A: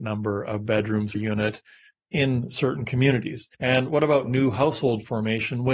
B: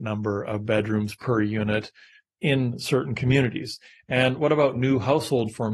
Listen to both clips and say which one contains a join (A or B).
A